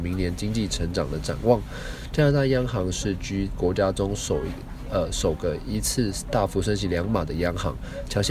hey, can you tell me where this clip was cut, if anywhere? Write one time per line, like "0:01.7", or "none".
0:03.6